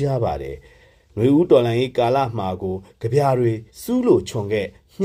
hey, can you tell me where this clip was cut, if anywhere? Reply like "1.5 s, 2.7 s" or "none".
3.7 s